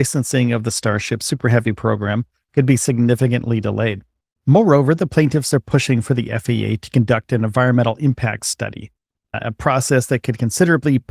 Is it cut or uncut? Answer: uncut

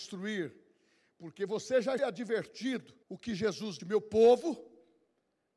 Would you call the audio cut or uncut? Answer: cut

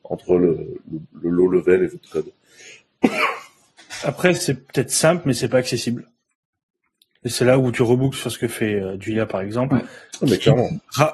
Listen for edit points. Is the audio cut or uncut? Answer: uncut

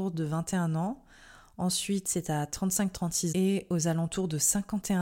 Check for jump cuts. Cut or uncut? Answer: cut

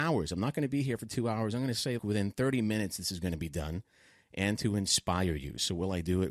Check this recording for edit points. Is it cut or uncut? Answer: cut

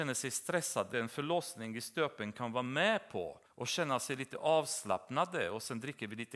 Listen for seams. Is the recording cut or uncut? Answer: cut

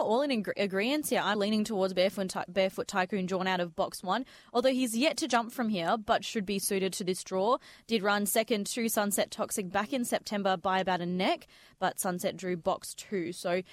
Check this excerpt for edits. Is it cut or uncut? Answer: cut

